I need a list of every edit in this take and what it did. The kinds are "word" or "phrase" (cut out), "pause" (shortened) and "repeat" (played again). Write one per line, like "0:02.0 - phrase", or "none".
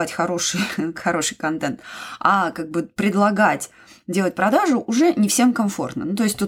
none